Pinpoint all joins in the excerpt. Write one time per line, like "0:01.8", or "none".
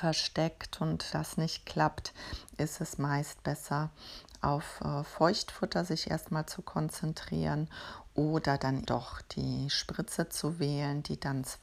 0:01.1
0:08.9